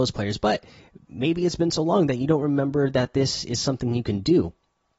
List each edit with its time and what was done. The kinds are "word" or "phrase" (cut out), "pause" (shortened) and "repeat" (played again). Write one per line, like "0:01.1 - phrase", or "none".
none